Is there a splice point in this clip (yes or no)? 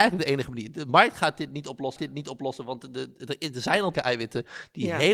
yes